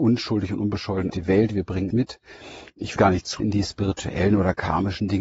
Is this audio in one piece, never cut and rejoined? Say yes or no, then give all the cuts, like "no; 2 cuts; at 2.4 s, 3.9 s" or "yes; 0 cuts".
no; 4 cuts; at 1.1 s, 1.9 s, 3.0 s, 3.4 s